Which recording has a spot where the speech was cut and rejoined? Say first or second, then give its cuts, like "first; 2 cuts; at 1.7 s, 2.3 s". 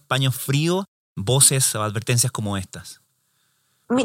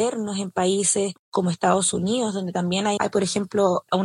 second; 1 cut; at 1.2 s